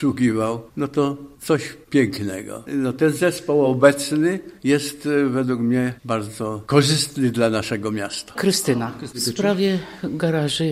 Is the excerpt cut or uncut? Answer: uncut